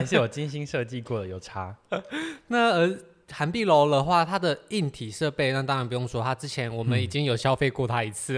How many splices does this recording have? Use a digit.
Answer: 0